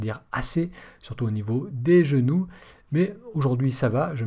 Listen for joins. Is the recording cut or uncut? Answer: uncut